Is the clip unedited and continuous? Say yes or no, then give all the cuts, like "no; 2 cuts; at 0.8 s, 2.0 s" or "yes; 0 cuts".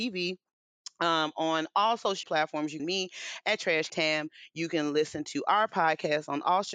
no; 3 cuts; at 2.2 s, 2.8 s, 3.9 s